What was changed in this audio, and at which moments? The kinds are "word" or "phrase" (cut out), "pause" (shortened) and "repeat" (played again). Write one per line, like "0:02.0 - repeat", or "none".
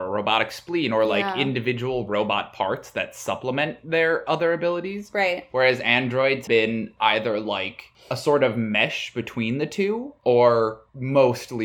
0:06.5 - word